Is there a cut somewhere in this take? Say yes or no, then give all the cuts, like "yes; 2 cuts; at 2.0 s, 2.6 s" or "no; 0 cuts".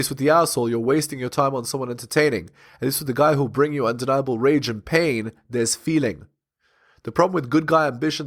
no; 0 cuts